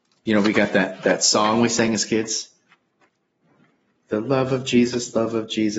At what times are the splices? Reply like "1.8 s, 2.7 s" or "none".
none

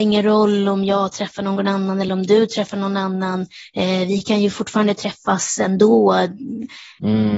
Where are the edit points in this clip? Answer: none

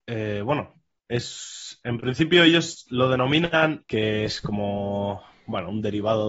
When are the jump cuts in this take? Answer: 3.8 s

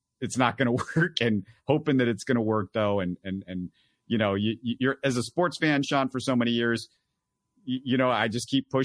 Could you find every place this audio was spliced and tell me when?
none

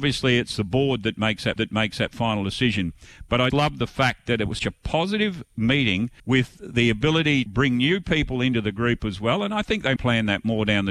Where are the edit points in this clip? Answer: 1.6 s, 3.5 s, 4.6 s, 6.2 s, 7.5 s, 10.0 s

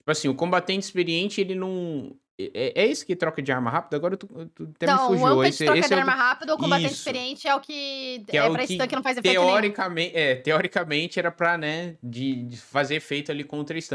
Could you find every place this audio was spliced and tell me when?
none

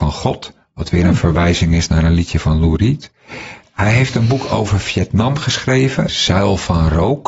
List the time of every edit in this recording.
6.1 s

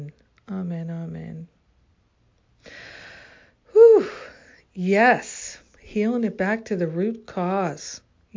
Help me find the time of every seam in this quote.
5.7 s

